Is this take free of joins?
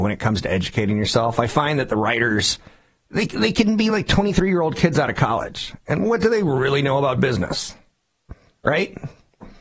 yes; 0 cuts

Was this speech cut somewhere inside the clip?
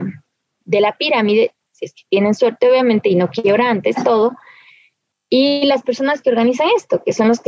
no; 0 cuts

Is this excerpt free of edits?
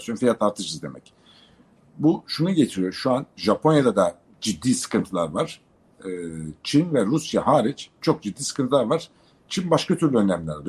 yes; 0 cuts

